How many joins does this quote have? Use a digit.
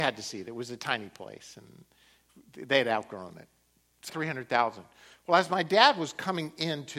1